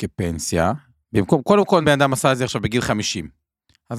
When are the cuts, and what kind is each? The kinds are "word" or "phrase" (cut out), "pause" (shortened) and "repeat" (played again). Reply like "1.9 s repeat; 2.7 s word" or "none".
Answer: 1.8 s word